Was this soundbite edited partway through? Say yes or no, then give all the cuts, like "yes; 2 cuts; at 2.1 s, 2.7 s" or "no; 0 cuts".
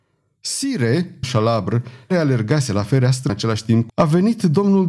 yes; 4 cuts; at 1.2 s, 2.1 s, 3.3 s, 3.9 s